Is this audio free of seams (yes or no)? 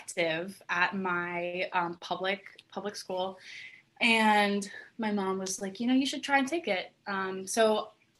yes